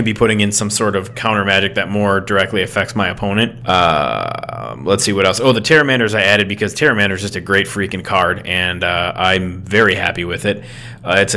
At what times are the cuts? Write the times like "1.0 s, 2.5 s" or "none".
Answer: none